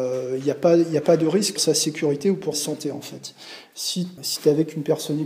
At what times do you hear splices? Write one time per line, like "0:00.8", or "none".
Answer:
0:01.6
0:02.5
0:04.2